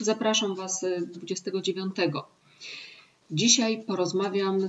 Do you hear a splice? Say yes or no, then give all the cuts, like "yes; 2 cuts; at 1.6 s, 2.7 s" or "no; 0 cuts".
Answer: yes; 1 cut; at 1.1 s